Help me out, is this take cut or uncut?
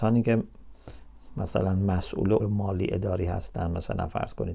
cut